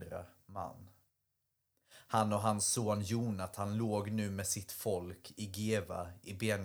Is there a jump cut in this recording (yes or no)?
no